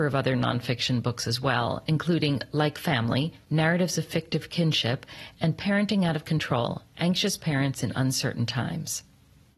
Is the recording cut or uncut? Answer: uncut